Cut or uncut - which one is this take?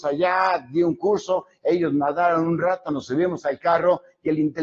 uncut